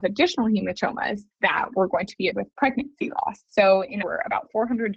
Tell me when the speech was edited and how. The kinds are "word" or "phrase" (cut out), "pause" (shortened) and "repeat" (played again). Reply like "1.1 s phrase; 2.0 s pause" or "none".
1.3 s pause; 2.3 s word; 3.5 s pause; 4.0 s phrase